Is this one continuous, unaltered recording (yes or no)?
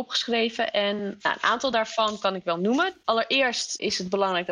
yes